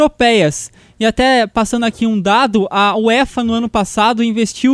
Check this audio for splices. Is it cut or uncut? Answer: uncut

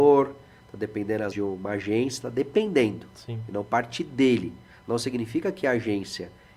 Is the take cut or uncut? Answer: cut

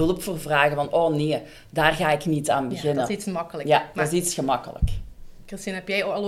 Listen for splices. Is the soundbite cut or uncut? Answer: uncut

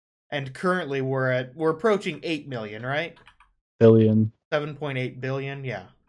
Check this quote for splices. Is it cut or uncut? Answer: uncut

